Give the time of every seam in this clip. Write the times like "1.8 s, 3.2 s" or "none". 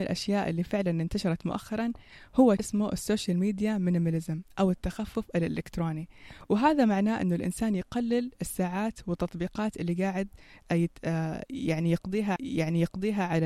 2.6 s, 12.4 s